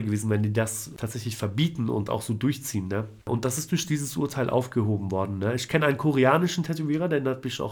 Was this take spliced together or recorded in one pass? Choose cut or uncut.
uncut